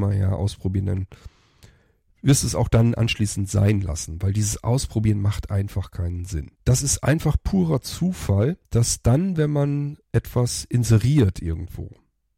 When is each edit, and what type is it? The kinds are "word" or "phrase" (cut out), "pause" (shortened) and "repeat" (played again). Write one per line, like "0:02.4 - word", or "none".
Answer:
0:06.6 - pause
0:08.7 - pause
0:10.0 - pause